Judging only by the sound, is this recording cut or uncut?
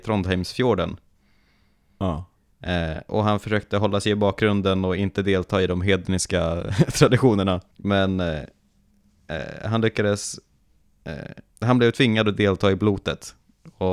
cut